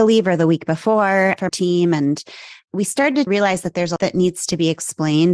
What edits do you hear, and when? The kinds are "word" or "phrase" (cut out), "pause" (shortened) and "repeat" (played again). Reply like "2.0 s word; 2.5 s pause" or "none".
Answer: 1.5 s word; 3.3 s word; 4.0 s word